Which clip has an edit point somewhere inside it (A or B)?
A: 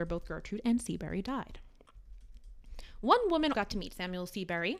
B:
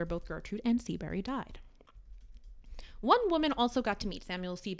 A